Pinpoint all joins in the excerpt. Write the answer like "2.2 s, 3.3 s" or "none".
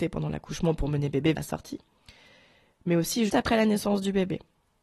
1.4 s, 3.3 s